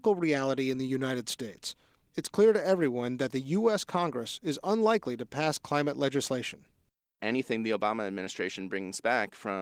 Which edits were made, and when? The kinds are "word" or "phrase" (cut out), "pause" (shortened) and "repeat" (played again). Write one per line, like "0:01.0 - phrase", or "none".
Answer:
none